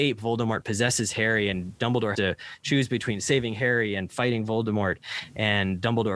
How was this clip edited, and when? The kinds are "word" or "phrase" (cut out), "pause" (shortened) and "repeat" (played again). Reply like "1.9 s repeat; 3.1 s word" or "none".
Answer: 2.1 s word